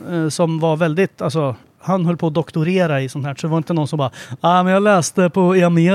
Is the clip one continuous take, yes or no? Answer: no